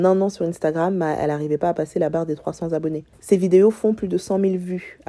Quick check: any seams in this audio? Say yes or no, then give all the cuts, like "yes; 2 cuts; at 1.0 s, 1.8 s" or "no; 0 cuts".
yes; 1 cut; at 3.1 s